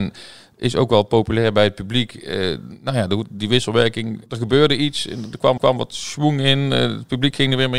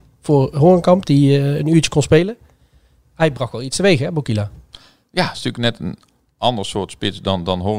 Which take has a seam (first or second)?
first